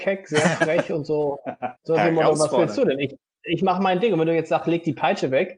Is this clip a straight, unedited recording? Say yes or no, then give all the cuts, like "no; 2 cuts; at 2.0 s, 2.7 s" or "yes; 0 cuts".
no; 1 cut; at 1.8 s